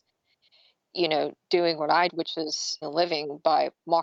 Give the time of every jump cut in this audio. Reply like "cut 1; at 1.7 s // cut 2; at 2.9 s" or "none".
cut 1; at 2.1 s // cut 2; at 2.8 s

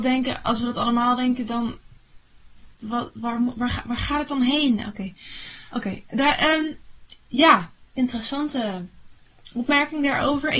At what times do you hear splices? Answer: cut 1; at 2.7 s

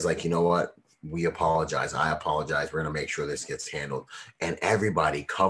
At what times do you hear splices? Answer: none

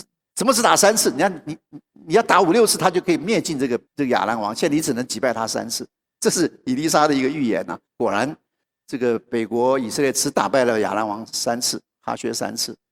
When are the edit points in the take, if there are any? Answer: cut 1; at 3.9 s // cut 2; at 7.9 s // cut 3; at 8.6 s

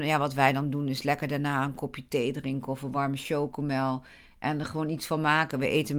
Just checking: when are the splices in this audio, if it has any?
none

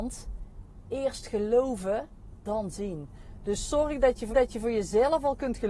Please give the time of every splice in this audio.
cut 1; at 2.4 s // cut 2; at 4.3 s

